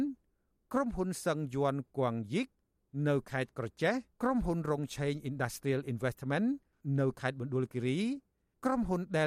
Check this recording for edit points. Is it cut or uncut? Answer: cut